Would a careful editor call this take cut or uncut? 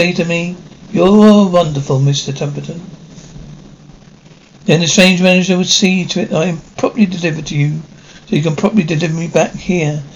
uncut